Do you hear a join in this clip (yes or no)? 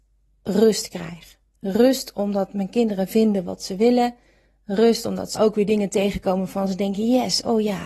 yes